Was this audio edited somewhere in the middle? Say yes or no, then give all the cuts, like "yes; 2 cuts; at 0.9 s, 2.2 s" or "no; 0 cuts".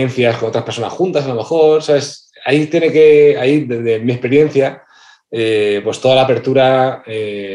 no; 0 cuts